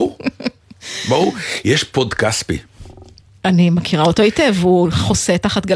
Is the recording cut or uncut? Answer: uncut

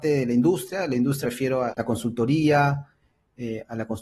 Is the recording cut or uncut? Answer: cut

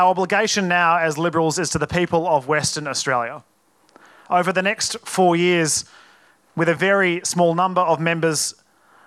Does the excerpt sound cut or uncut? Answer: uncut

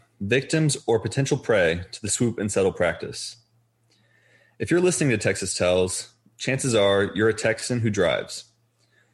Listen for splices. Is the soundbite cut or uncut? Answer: uncut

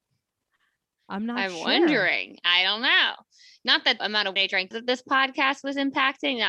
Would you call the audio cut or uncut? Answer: cut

